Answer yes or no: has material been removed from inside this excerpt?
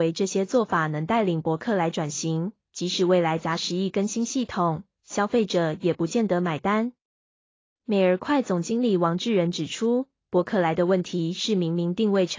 no